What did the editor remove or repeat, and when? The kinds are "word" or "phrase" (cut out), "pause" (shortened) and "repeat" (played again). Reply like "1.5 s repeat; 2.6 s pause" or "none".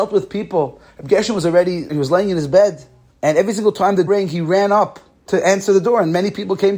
1.9 s phrase; 3.1 s pause; 4.1 s word; 5.3 s phrase

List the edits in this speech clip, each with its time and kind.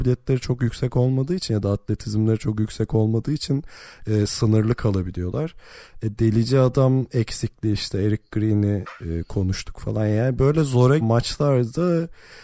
11.0 s word

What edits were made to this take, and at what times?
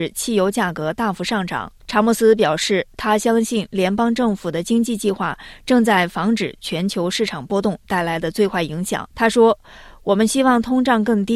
1.8 s pause; 9.1 s pause

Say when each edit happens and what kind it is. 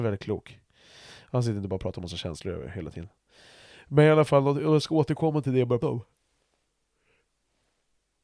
5.8 s word

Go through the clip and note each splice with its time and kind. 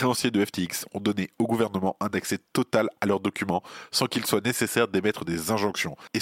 none

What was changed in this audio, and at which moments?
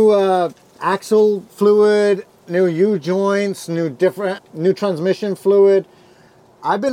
4.4 s word

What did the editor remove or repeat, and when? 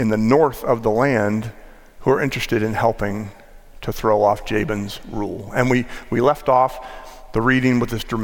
none

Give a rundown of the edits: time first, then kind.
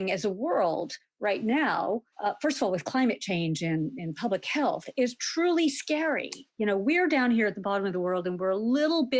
2.1 s pause; 6.5 s pause

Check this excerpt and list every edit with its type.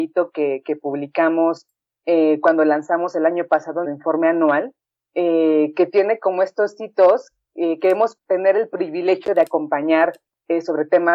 3.8 s word; 8.2 s word

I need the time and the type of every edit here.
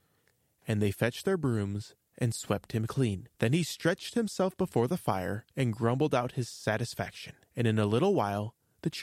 3.3 s pause; 5.5 s pause; 7.4 s pause

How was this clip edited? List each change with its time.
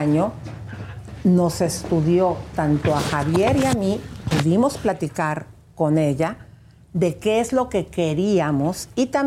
4.3 s word

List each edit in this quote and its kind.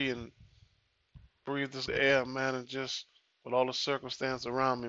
1.9 s word

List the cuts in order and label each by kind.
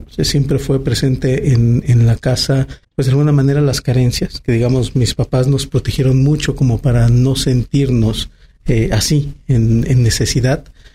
2.8 s pause

